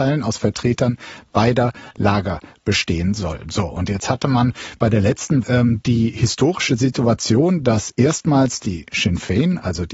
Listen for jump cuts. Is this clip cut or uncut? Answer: cut